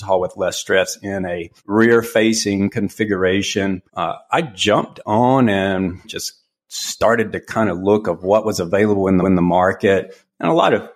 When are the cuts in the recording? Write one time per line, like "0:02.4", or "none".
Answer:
0:01.6
0:03.9
0:06.0
0:09.2